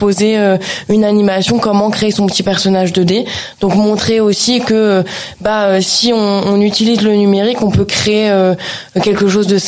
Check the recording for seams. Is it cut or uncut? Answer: uncut